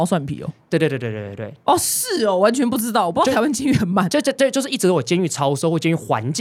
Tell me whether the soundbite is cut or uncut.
uncut